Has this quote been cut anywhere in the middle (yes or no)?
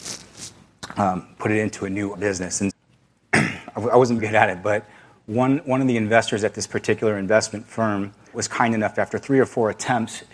yes